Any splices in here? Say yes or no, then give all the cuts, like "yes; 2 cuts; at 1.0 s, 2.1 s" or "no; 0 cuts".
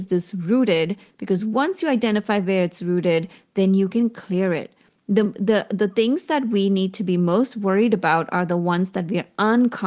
no; 0 cuts